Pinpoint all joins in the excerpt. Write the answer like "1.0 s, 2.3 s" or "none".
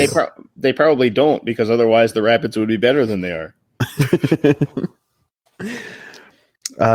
none